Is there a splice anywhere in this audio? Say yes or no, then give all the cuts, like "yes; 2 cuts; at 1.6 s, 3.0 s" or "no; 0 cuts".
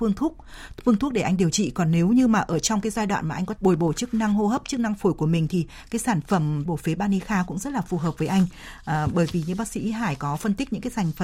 yes; 2 cuts; at 3.6 s, 6.7 s